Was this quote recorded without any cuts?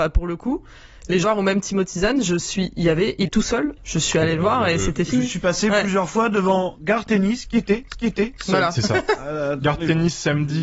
no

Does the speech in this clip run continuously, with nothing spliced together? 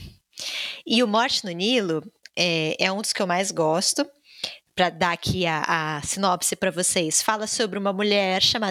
yes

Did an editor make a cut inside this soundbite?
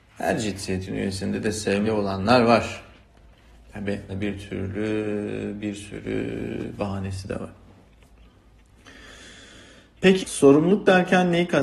yes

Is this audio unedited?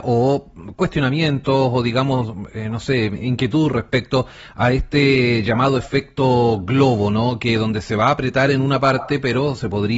yes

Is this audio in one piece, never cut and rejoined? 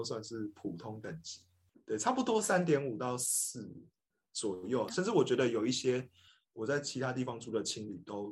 no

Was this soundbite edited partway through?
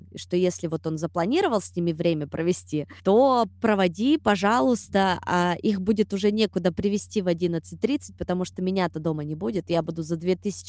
no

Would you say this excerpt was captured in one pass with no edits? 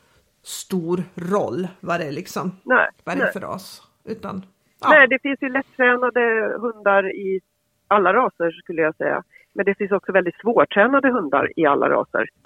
yes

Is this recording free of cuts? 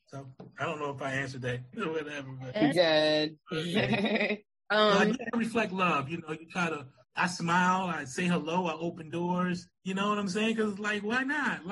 no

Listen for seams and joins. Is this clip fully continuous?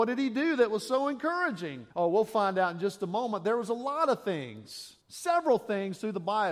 no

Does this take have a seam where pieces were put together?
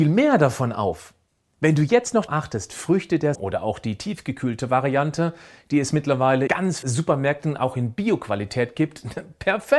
yes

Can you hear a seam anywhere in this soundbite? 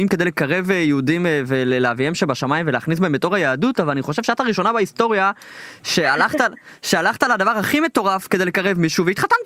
no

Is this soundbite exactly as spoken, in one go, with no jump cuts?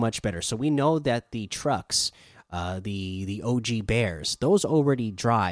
yes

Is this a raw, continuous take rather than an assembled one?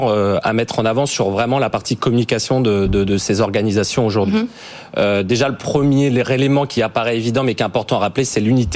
yes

